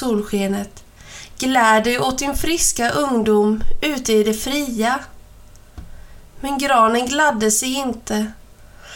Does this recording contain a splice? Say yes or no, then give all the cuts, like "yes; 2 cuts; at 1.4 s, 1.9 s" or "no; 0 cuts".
no; 0 cuts